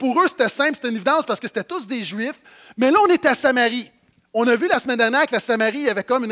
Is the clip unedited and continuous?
yes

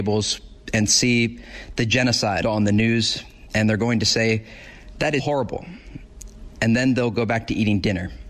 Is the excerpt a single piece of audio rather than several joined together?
no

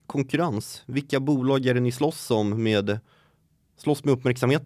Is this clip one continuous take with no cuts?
yes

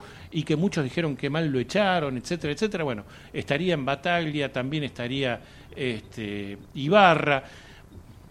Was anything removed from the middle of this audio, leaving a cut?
no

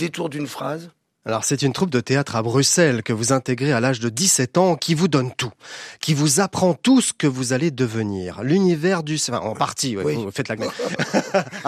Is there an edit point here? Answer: yes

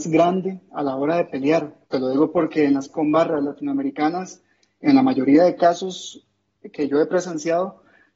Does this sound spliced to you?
yes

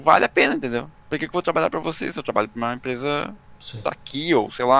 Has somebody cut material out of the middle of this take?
no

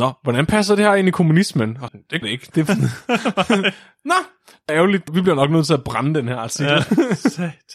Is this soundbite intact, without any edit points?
no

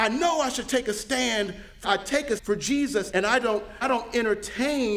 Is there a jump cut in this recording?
yes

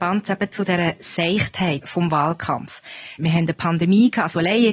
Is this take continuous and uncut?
yes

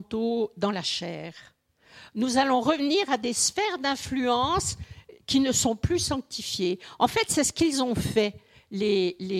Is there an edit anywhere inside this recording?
no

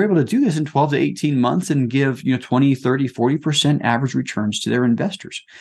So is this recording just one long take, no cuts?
yes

